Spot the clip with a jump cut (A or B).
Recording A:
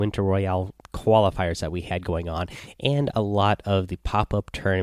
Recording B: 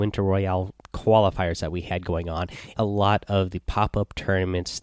B